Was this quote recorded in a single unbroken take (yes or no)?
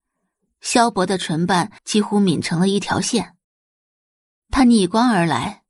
no